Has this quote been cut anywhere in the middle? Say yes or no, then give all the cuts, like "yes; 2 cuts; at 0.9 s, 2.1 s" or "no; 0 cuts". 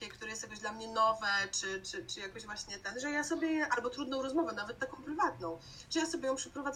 no; 0 cuts